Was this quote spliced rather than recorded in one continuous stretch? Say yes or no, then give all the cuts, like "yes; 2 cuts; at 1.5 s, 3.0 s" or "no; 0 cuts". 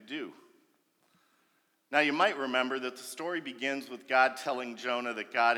no; 0 cuts